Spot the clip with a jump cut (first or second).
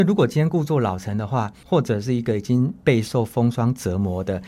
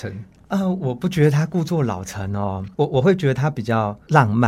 second